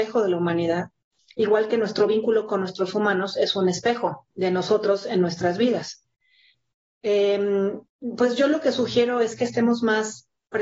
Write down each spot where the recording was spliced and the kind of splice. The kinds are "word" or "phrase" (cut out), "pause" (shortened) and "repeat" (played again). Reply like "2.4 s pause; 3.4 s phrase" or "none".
4.3 s pause; 7.9 s pause